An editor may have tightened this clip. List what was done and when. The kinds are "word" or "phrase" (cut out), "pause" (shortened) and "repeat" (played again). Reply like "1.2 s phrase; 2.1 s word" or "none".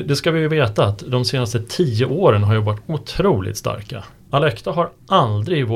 none